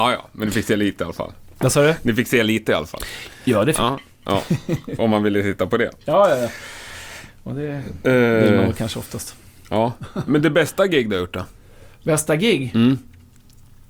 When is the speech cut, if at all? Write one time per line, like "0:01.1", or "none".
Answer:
none

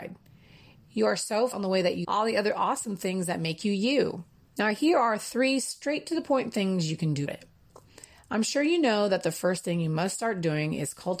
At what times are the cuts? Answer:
0:01.5
0:02.0
0:04.5
0:07.3

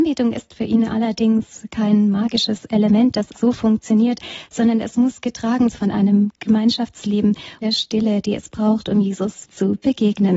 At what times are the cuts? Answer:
0:03.3
0:05.7
0:07.6
0:09.5

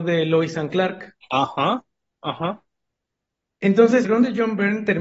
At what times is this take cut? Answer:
0:04.0

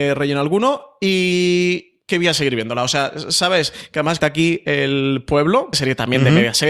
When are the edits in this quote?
0:04.2
0:05.7

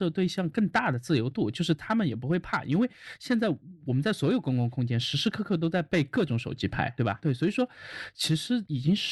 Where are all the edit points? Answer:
none

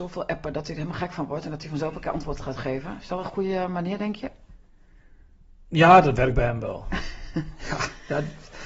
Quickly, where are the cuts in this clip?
none

